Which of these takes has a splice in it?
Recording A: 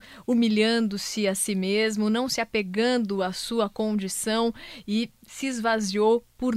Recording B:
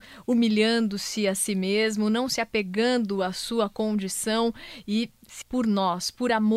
B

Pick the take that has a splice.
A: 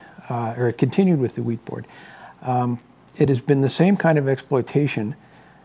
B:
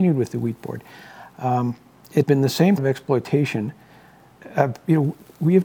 B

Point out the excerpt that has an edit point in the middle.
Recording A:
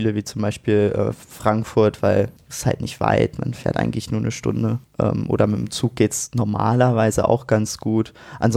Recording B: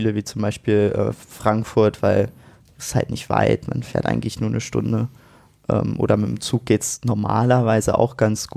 A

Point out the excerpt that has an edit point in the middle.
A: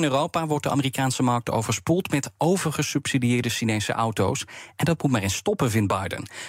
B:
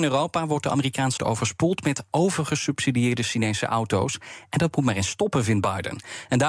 B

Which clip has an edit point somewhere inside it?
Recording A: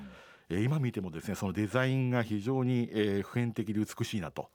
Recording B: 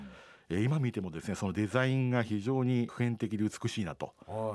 B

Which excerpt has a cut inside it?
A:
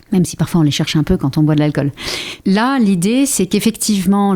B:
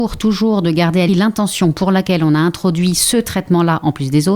B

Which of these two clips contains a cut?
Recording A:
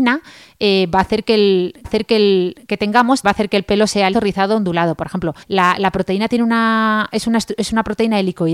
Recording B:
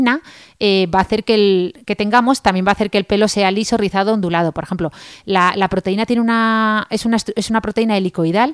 A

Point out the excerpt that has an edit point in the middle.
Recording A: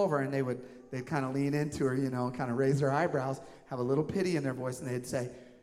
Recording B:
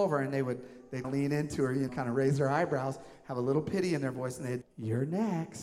B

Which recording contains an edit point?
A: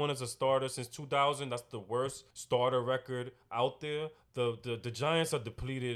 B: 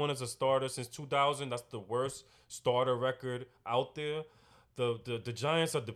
A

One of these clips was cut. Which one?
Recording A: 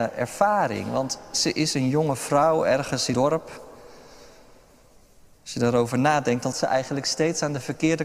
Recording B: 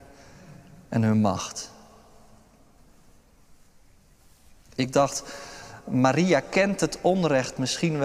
A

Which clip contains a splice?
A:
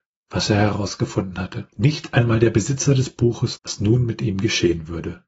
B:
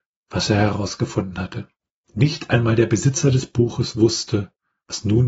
A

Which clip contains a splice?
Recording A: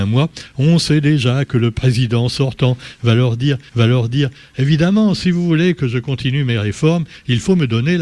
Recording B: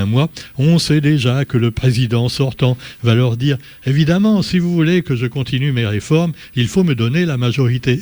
A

